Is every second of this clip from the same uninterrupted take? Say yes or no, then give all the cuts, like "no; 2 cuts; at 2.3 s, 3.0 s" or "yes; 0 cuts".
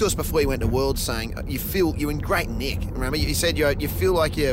yes; 0 cuts